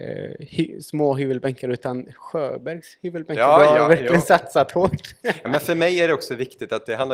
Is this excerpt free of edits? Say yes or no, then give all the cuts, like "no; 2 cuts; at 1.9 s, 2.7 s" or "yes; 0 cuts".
yes; 0 cuts